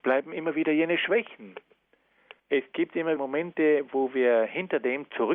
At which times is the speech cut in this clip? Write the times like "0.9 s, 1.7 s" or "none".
2.4 s, 3.2 s